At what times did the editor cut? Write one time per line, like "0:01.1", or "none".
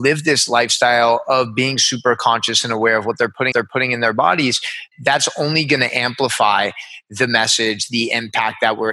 0:03.5
0:04.9